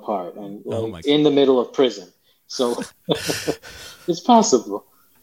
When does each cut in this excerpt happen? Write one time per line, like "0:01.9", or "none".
0:01.0
0:02.9